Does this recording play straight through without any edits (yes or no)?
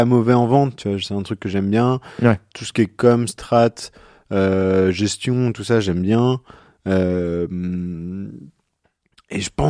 yes